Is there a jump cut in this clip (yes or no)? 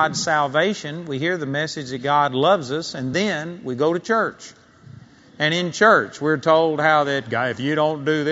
no